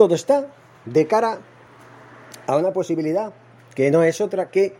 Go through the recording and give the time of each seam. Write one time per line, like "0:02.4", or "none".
none